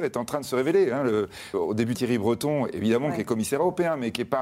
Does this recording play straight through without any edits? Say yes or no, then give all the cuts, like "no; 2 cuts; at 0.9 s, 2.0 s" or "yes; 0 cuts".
no; 2 cuts; at 1.5 s, 1.9 s